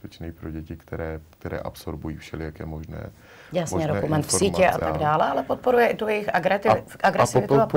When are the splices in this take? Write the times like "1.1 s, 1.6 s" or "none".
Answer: 1.3 s, 4.8 s